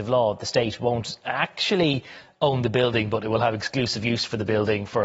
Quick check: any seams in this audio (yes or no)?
no